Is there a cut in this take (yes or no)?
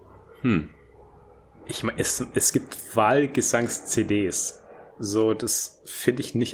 yes